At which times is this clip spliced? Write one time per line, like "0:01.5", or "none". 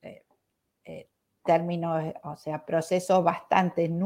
none